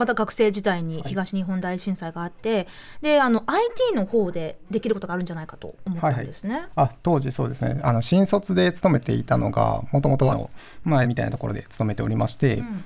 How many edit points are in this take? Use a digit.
2